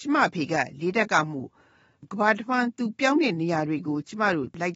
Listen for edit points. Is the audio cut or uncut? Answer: uncut